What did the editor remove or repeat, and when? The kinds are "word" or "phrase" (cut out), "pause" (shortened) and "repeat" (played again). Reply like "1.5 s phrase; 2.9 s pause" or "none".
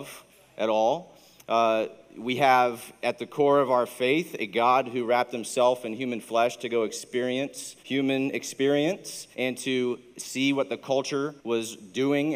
7.8 s pause; 9.3 s pause; 11.4 s pause